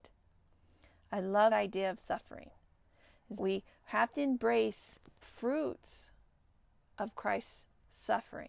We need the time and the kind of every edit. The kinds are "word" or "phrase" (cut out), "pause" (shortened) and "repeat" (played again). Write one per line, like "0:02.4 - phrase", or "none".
0:01.5 - word
0:03.4 - word
0:05.2 - word